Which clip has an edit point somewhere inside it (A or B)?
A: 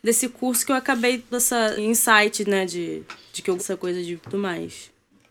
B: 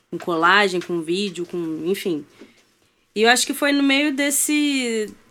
A